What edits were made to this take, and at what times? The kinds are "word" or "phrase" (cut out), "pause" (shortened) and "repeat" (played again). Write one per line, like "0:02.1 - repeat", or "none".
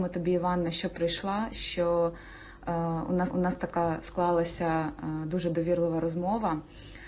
0:03.3 - repeat